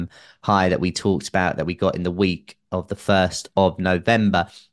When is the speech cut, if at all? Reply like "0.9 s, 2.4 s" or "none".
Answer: none